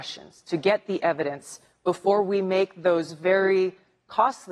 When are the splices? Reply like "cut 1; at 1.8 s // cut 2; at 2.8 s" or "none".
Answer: none

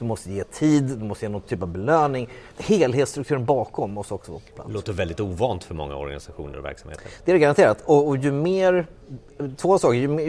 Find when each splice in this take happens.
cut 1; at 2.5 s

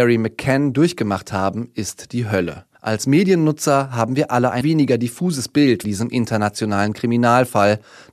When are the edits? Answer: cut 1; at 2.7 s // cut 2; at 4.6 s // cut 3; at 5.8 s

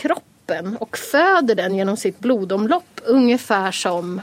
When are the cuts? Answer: none

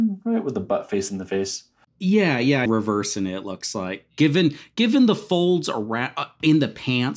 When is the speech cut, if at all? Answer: cut 1; at 2.7 s

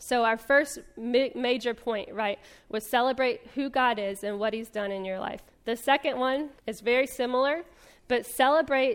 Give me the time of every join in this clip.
cut 1; at 5.5 s // cut 2; at 6.6 s

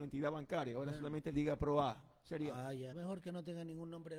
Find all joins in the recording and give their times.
cut 1; at 2.9 s

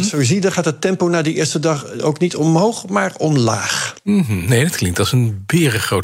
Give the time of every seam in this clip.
cut 1; at 4.0 s

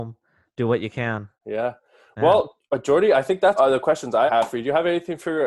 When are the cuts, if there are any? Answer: cut 1; at 1.3 s // cut 2; at 3.6 s // cut 3; at 4.3 s

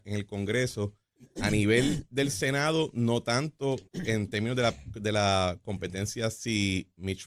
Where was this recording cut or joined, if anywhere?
cut 1; at 1.3 s // cut 2; at 3.9 s

